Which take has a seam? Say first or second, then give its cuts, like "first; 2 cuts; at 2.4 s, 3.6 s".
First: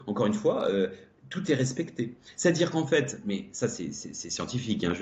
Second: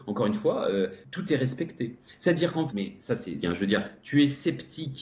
second; 3 cuts; at 1.0 s, 2.7 s, 3.4 s